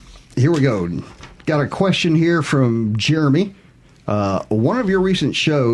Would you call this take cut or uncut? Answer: uncut